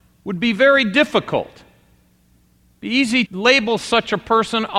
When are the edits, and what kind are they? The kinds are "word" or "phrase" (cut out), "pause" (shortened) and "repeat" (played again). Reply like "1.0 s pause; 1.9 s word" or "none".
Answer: 3.3 s word